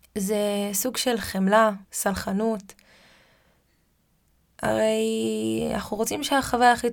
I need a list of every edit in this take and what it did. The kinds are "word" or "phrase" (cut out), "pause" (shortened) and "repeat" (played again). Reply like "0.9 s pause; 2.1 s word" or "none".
1.8 s pause